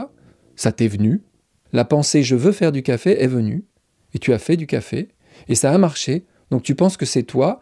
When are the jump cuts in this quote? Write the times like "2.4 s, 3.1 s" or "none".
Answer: none